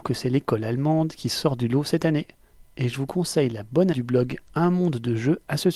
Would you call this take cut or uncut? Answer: cut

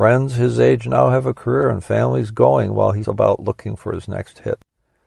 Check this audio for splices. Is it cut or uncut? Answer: cut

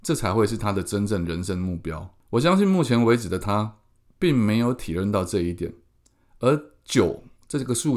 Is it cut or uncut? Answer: uncut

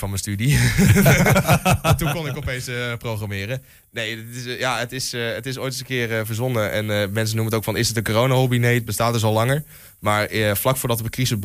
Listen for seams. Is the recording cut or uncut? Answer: uncut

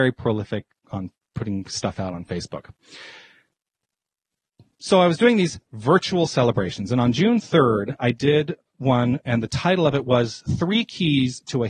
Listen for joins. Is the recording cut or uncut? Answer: uncut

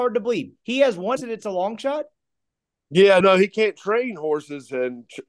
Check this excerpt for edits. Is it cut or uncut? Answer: cut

